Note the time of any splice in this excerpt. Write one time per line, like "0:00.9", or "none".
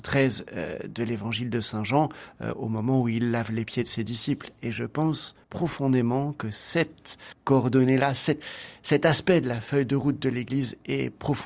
0:05.4
0:07.3